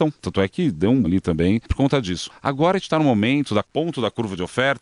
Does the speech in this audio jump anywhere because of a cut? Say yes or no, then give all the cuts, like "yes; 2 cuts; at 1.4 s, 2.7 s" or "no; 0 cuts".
yes; 1 cut; at 1.0 s